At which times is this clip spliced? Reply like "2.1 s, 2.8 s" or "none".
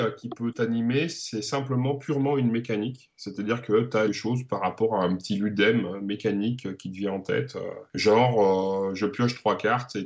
4.1 s